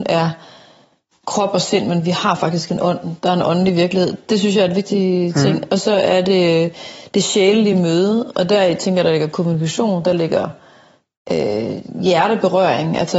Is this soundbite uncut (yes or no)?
yes